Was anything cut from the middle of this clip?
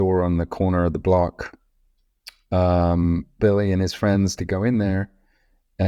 yes; 2 cuts; at 3.4 s, 4.4 s

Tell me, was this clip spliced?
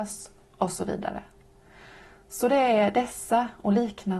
no; 0 cuts

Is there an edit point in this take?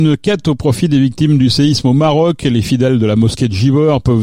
no; 0 cuts

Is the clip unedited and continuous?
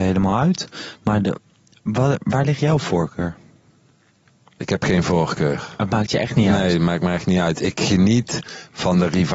yes; 0 cuts

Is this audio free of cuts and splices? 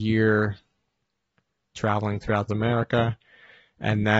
no; 2 cuts; at 1.7 s, 2.5 s

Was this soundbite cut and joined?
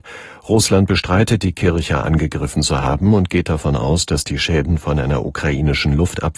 no; 0 cuts

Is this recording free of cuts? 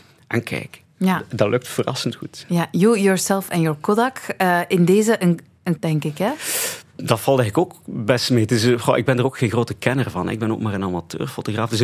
no; 1 cut; at 5.8 s

